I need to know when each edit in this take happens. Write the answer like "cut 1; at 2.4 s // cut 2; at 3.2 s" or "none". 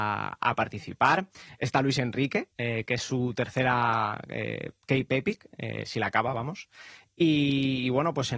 cut 1; at 2.5 s